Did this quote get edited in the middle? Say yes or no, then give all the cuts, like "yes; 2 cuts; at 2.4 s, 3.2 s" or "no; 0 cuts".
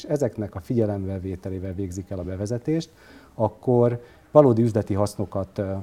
no; 0 cuts